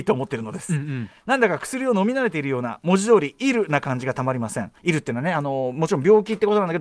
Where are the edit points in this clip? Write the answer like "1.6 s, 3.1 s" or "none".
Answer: 4.8 s

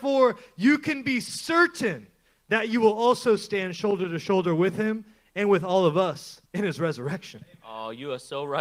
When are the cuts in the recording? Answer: 6.5 s

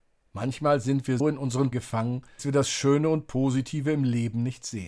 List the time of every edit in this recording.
1.2 s, 1.7 s, 2.4 s

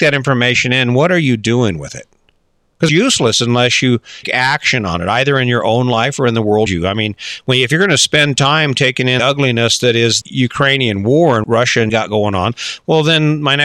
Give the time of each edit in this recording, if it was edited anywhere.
2.9 s, 4.2 s, 6.7 s, 9.2 s, 10.2 s, 11.4 s, 11.9 s

